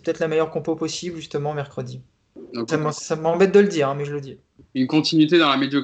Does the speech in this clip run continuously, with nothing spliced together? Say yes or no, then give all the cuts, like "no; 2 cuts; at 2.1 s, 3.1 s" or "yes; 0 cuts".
no; 1 cut; at 2.7 s